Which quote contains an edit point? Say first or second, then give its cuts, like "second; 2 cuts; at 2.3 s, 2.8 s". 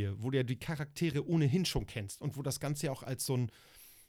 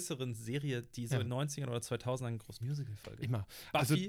second; 2 cuts; at 1.3 s, 2.6 s